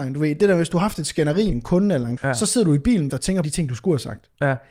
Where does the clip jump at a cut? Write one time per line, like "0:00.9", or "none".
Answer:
0:01.5
0:02.2
0:03.1
0:03.4